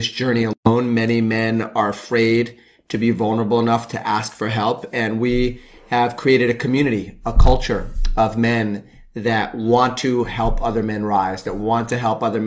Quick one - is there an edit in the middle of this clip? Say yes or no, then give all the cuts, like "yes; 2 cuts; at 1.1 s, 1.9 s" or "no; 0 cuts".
no; 0 cuts